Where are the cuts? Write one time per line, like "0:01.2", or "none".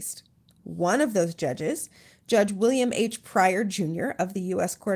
none